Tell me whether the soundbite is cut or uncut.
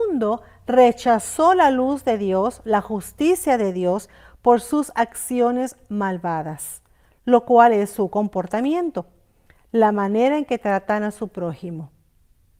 uncut